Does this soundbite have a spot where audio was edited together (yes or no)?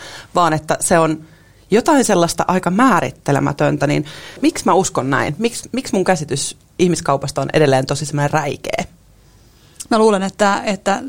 no